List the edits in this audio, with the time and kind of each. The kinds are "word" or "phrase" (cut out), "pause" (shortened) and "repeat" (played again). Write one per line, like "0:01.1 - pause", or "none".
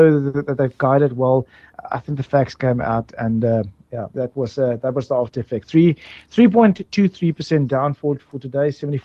0:04.1 - pause